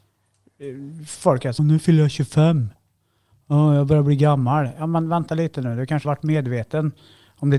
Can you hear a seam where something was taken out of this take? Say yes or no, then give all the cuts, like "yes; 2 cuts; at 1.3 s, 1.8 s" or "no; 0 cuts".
yes; 2 cuts; at 1.6 s, 6.0 s